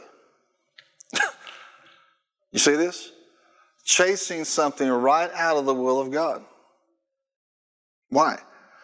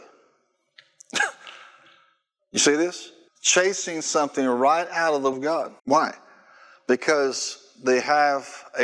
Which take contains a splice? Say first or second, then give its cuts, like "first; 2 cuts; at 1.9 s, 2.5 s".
second; 3 cuts; at 3.3 s, 5.3 s, 5.8 s